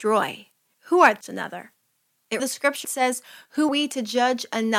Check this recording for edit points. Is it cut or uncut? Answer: cut